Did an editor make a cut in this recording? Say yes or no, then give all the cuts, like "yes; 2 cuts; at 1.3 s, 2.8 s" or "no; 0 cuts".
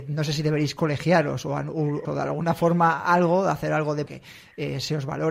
yes; 2 cuts; at 2.0 s, 4.1 s